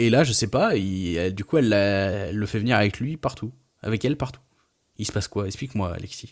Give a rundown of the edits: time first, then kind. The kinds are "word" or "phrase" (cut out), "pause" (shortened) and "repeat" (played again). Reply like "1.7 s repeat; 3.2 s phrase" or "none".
none